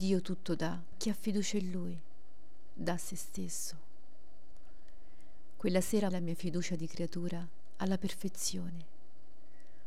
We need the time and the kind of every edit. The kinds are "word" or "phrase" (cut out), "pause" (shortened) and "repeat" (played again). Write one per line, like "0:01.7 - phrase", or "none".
0:00.9 - word
0:06.1 - word